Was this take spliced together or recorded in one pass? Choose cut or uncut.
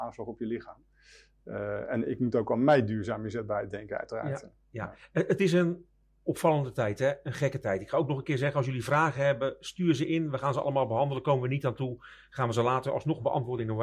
uncut